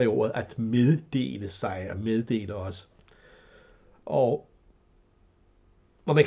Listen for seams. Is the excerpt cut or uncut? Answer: uncut